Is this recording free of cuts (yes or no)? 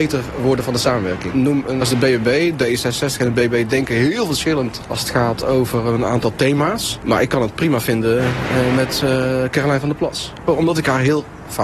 no